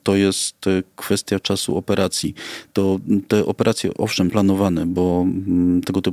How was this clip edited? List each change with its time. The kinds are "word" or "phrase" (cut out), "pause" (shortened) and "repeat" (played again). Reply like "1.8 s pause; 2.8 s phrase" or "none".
4.3 s word